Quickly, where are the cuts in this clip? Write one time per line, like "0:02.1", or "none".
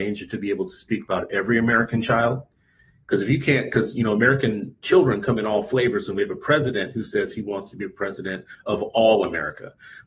none